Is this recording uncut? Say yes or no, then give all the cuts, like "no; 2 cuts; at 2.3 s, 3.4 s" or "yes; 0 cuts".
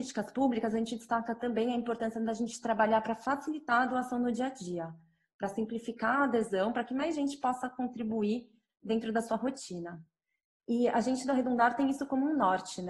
yes; 0 cuts